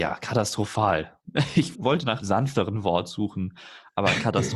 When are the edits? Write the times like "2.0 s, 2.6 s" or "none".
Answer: 1.7 s, 2.2 s